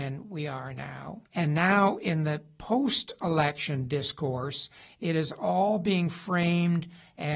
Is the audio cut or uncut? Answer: cut